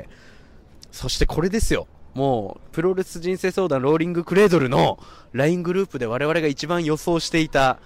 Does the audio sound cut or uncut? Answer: uncut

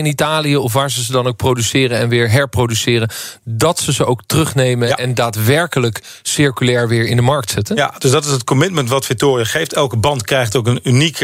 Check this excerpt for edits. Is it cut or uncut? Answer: uncut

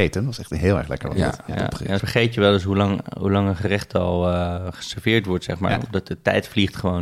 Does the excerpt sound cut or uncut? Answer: cut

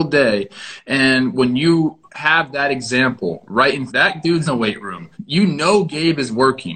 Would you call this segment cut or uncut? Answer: cut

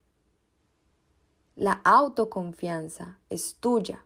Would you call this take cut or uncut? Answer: uncut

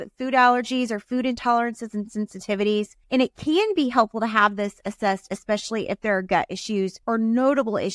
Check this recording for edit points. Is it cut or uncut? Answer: cut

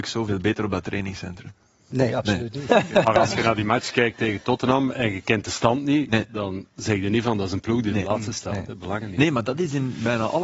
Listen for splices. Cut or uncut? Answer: uncut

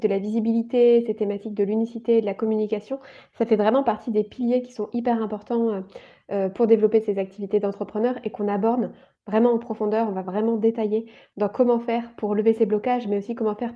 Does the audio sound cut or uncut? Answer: uncut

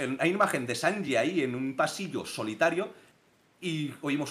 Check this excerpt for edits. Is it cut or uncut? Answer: uncut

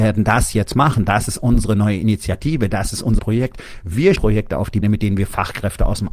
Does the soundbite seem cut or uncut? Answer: cut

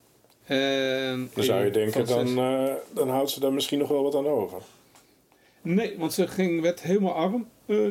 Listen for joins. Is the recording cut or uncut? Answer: uncut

